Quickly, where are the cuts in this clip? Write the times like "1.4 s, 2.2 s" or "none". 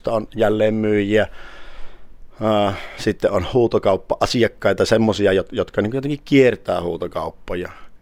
none